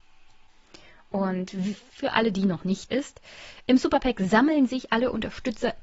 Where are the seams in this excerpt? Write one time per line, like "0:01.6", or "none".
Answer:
0:02.9